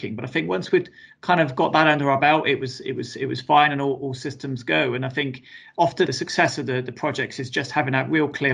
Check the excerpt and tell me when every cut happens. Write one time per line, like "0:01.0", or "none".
0:06.1